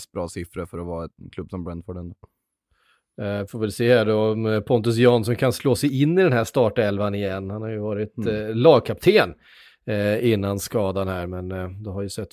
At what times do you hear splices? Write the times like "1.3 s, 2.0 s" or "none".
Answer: none

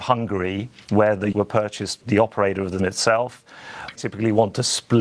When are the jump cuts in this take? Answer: 1.3 s, 2.0 s, 2.8 s, 3.9 s

